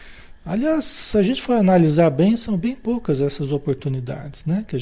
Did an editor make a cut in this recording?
no; 0 cuts

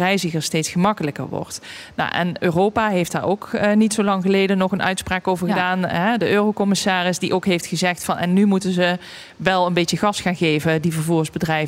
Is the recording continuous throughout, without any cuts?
yes; 0 cuts

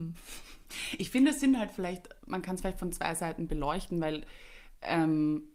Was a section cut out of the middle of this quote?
no; 0 cuts

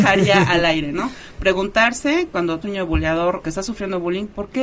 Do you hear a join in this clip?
yes; 2 cuts; at 2.6 s, 3.4 s

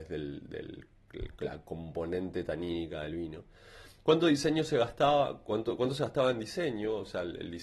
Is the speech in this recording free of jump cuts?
yes; 0 cuts

